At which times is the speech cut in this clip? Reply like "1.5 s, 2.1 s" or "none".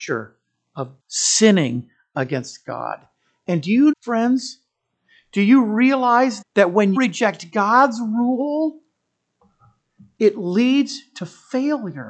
1.0 s, 3.9 s, 6.4 s, 7.0 s